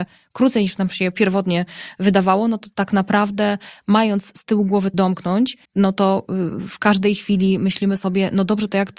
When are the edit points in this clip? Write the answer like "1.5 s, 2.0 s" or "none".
4.9 s, 5.6 s